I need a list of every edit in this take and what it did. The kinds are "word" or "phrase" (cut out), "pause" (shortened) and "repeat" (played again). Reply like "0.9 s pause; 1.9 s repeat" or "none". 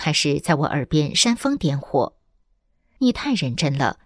none

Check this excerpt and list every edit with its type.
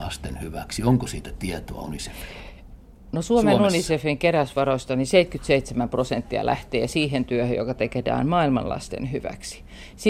none

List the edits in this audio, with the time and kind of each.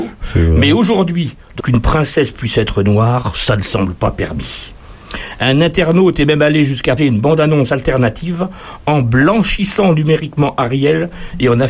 1.6 s phrase; 7.0 s word

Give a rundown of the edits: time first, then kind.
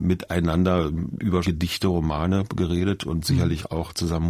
1.4 s word

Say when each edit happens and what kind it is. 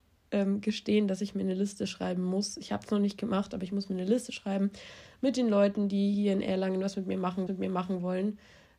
7.5 s repeat

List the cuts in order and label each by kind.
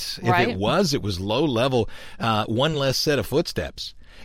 none

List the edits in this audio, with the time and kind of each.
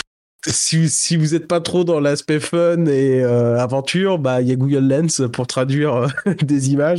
none

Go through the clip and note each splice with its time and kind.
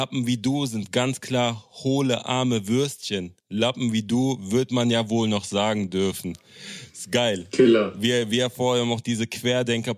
3.4 s pause

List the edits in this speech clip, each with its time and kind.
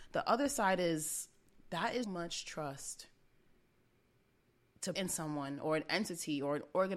2.0 s word; 5.0 s word

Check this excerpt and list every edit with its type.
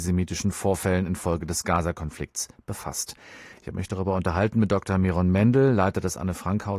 none

